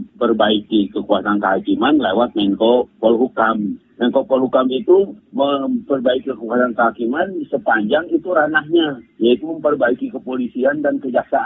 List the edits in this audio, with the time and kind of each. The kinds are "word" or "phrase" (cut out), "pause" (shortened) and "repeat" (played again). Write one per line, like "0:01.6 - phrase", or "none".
none